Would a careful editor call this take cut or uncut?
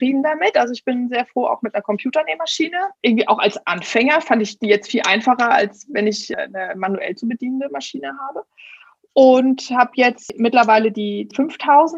cut